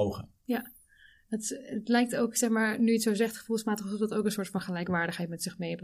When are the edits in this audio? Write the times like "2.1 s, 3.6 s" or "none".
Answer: none